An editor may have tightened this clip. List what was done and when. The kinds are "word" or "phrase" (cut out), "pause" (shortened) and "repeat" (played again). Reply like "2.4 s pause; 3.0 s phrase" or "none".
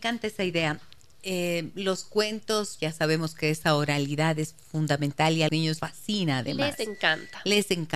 2.8 s word; 5.5 s word; 5.8 s word